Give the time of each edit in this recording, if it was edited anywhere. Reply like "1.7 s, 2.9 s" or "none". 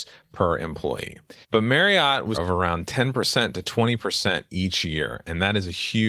1.4 s, 2.3 s